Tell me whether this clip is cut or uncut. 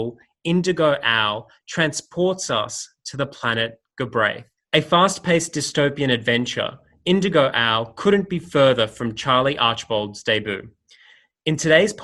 uncut